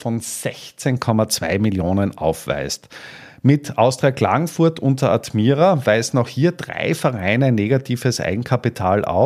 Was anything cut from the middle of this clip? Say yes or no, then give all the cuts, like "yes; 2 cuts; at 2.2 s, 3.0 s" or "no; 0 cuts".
no; 0 cuts